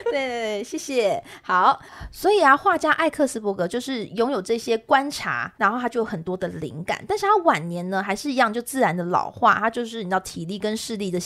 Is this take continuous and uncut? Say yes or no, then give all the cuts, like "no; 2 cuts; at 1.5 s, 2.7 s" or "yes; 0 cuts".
no; 1 cut; at 5.6 s